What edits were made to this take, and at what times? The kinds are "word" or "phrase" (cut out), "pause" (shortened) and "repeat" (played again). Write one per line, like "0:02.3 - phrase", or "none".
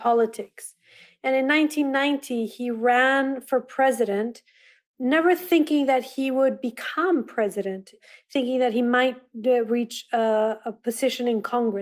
none